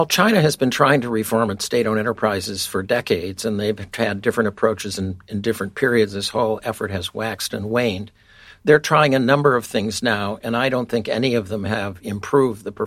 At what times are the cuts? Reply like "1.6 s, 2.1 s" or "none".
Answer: none